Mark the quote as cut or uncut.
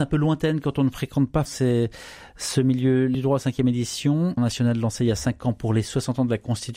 cut